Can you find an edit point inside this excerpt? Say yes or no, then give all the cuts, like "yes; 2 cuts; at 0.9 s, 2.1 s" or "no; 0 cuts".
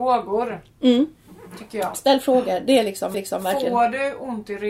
yes; 1 cut; at 3.1 s